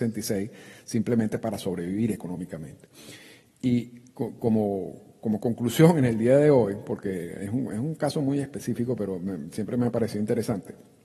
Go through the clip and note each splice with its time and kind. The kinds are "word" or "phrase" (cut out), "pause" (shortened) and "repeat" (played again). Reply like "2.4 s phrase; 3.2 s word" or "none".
none